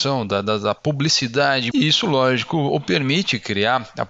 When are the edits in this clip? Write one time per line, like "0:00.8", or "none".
0:01.7